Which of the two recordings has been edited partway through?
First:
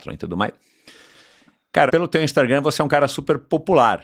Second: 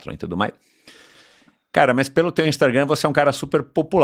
first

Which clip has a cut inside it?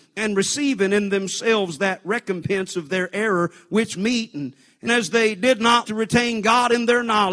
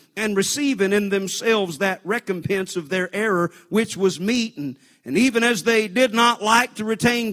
first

